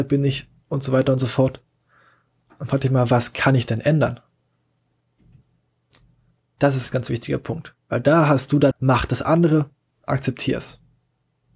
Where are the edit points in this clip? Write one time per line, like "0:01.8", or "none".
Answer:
0:06.9
0:08.7